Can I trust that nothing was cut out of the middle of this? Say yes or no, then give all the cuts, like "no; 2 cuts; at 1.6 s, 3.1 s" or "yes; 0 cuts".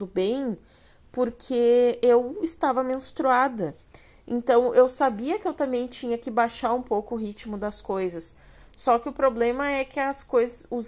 yes; 0 cuts